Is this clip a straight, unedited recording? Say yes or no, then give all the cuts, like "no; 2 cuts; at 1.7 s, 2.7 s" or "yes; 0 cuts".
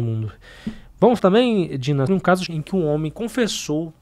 no; 3 cuts; at 1.2 s, 2.1 s, 2.5 s